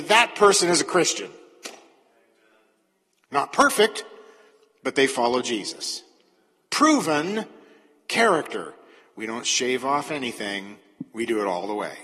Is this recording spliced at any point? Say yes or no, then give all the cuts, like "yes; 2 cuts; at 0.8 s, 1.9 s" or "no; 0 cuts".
no; 0 cuts